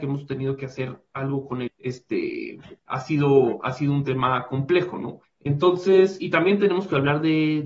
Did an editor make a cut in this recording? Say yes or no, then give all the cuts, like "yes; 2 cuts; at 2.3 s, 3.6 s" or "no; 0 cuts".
yes; 3 cuts; at 1.7 s, 2.8 s, 5.2 s